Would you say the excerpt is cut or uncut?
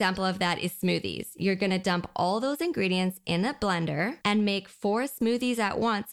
cut